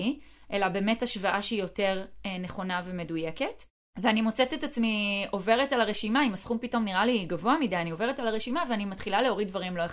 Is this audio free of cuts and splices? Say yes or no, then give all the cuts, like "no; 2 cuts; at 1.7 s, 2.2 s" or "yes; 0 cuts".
yes; 0 cuts